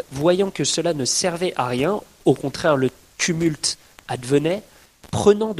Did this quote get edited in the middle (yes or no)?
no